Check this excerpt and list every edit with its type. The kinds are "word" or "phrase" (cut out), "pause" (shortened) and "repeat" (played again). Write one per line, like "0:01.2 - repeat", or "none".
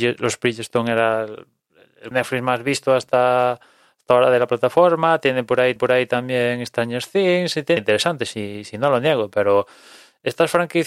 0:02.1 - phrase
0:05.8 - repeat
0:07.8 - phrase